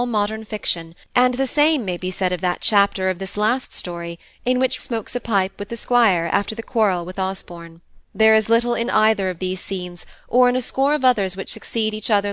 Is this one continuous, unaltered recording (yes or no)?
no